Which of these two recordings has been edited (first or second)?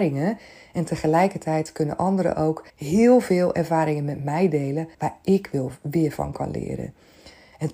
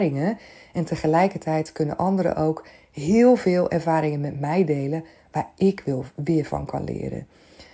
first